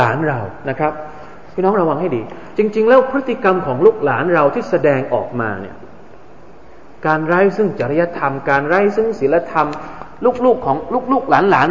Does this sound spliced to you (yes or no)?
no